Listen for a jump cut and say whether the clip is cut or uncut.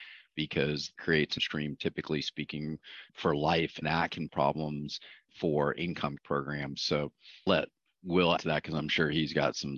cut